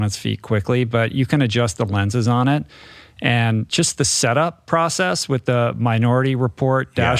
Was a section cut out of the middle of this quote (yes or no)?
no